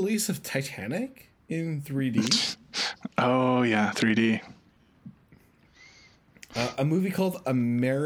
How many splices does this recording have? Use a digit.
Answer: 1